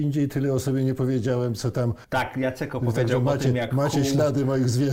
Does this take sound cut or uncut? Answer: uncut